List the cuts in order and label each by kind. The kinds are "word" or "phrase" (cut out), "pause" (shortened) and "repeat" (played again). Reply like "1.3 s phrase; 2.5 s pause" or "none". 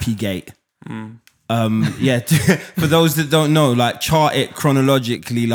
none

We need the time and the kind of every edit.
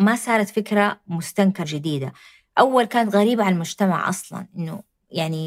1.6 s word

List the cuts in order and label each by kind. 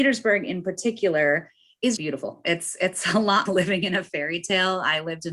2.0 s word; 3.5 s word

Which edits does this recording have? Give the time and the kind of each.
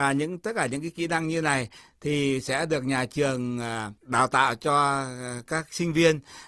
4.0 s pause

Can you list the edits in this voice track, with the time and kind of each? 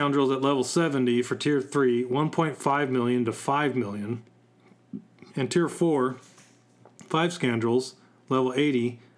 5.3 s pause

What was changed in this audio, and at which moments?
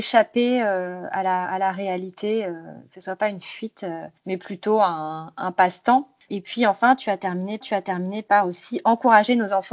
4.2 s pause; 7.6 s repeat

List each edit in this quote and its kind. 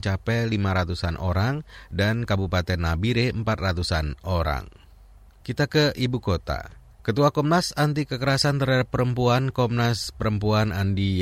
6.9 s pause

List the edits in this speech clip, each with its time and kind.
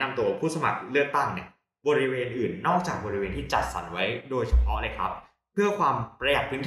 none

